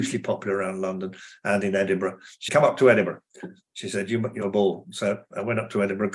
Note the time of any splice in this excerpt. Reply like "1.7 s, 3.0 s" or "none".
2.5 s, 4.4 s